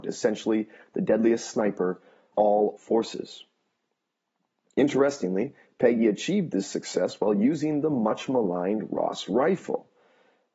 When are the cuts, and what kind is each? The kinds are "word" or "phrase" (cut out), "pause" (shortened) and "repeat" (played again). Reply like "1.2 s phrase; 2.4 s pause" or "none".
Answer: 2.3 s word; 2.8 s word